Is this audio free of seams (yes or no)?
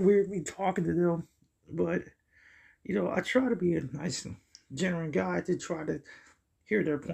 yes